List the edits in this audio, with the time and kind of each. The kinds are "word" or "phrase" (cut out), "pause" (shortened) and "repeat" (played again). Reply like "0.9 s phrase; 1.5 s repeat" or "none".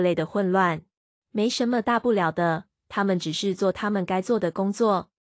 1.1 s pause